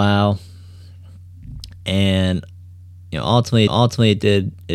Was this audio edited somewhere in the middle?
yes; 1 cut; at 3.7 s

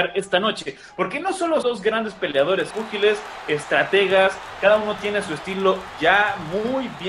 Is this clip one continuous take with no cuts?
no; 2 cuts; at 1.6 s, 2.7 s

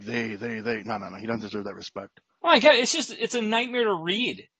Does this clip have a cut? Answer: no; 0 cuts

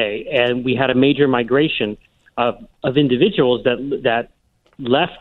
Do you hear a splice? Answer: no; 0 cuts

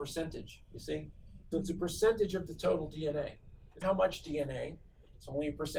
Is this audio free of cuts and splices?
no; 2 cuts; at 1.5 s, 3.8 s

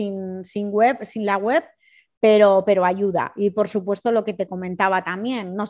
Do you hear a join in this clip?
no; 0 cuts

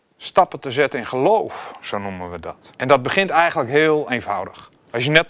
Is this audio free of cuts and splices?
no; 1 cut; at 2.7 s

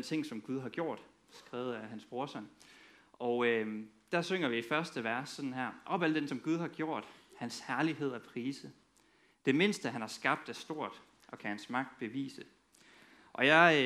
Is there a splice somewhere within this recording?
yes; 1 cut; at 6.3 s

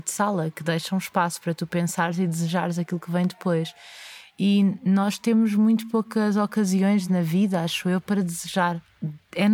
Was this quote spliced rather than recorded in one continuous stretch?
no; 0 cuts

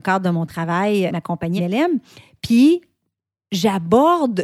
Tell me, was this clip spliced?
yes; 2 cuts; at 1.1 s, 1.6 s

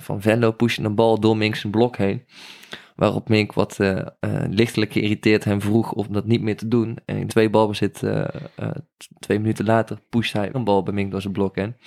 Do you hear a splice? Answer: yes; 3 cuts; at 7.3 s, 10.0 s, 10.5 s

